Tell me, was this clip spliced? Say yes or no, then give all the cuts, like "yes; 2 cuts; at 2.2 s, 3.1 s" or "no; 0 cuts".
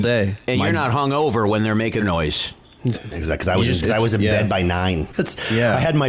yes; 4 cuts; at 2.0 s, 2.9 s, 3.8 s, 5.1 s